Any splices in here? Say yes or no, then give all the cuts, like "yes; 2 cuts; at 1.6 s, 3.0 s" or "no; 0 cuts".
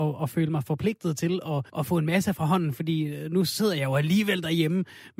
yes; 1 cut; at 1.7 s